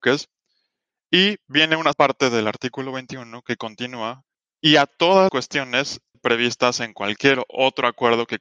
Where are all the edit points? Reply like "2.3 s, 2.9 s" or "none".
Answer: 1.9 s, 4.3 s, 5.3 s, 6.1 s

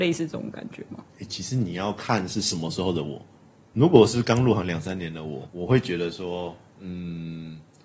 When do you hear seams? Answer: 1.1 s, 5.5 s

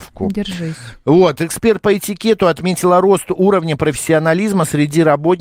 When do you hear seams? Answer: none

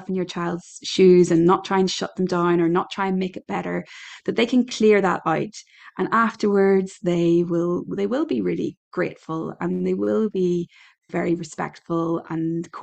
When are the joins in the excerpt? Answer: 11.1 s

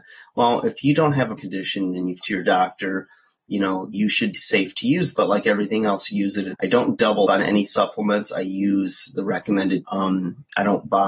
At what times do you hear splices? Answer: 1.4 s, 2.2 s, 3.9 s, 4.3 s, 5.1 s, 6.5 s, 7.3 s, 9.8 s

